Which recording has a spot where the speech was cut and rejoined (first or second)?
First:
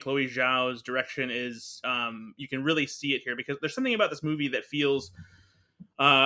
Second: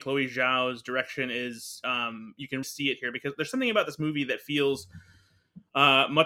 second